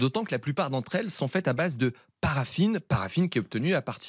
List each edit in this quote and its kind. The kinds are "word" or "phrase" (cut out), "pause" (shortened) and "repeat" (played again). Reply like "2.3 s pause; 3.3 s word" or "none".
none